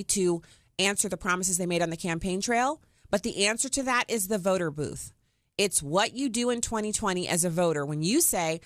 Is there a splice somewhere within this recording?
no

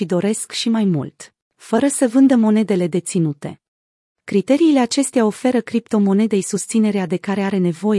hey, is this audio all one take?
no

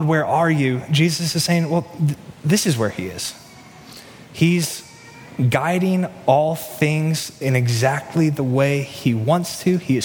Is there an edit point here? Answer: no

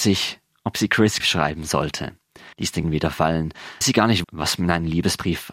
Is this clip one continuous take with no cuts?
no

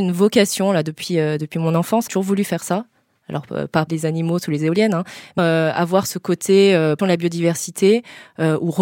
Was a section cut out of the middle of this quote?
yes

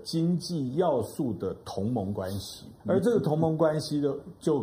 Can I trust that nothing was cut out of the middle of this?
no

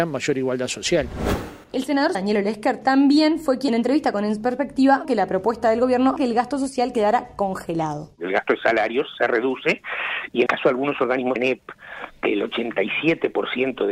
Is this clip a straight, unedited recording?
no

